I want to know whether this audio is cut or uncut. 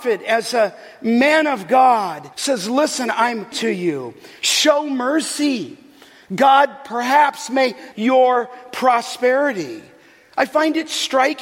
cut